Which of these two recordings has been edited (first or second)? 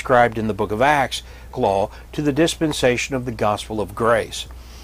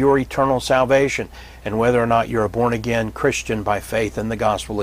first